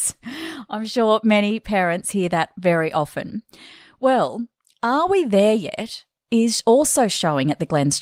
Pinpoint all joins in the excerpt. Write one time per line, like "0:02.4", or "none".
none

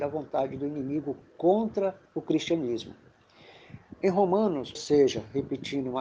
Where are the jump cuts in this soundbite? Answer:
0:02.1
0:04.7

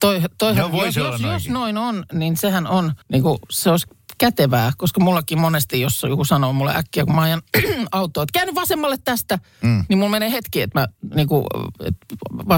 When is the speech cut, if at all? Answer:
0:03.0

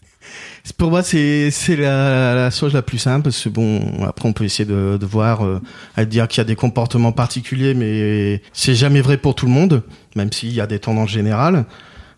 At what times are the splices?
0:08.5

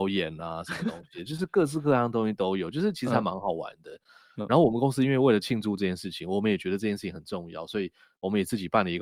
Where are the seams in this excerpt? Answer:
none

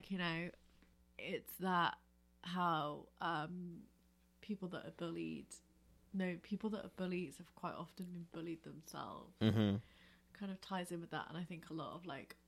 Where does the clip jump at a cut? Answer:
none

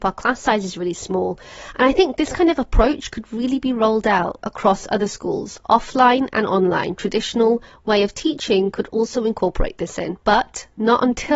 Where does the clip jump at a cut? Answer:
none

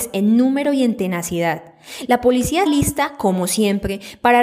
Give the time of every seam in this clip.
0:02.7

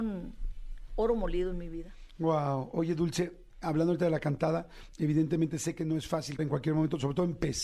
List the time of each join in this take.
0:06.4

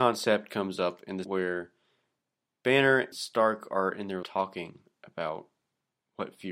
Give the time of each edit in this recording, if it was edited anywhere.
0:01.2
0:03.1
0:04.2

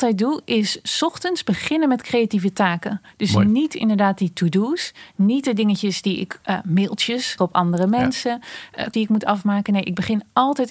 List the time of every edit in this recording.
0:07.4
0:08.9

